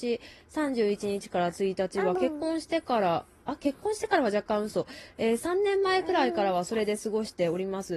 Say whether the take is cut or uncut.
uncut